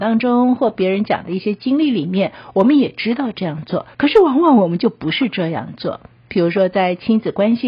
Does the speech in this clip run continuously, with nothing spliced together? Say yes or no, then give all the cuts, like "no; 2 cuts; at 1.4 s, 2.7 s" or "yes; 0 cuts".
no; 1 cut; at 3.9 s